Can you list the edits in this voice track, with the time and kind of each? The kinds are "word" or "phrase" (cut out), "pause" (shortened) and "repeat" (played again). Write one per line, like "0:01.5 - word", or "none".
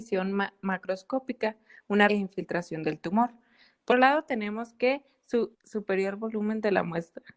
0:02.1 - phrase
0:03.9 - word
0:05.5 - word